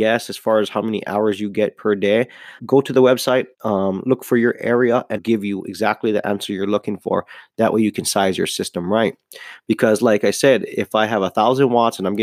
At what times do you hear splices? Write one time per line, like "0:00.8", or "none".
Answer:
0:02.6
0:03.5
0:05.2